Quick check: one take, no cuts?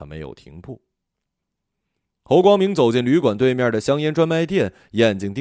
yes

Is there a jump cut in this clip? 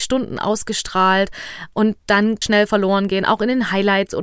yes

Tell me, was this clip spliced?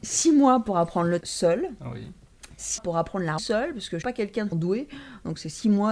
yes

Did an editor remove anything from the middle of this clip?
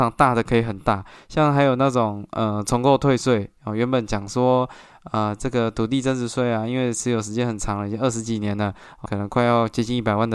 yes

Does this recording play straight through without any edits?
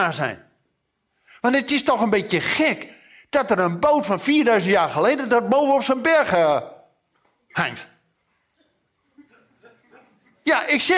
yes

